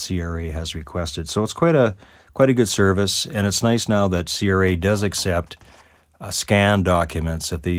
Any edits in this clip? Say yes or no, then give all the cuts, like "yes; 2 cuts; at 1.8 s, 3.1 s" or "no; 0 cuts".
no; 0 cuts